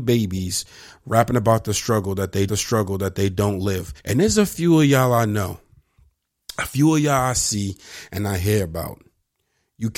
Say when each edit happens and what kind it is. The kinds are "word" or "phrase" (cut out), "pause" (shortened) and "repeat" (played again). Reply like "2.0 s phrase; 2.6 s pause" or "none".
2.5 s repeat; 4.0 s pause